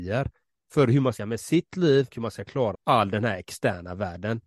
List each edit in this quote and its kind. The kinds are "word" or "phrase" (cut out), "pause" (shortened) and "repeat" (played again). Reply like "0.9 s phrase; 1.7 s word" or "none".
1.2 s word; 2.1 s word; 2.7 s word